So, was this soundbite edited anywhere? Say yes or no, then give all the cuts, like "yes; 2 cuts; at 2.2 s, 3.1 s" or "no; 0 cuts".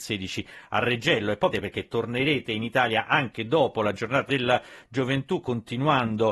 yes; 2 cuts; at 1.5 s, 4.3 s